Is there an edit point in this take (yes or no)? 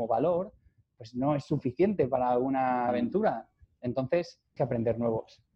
yes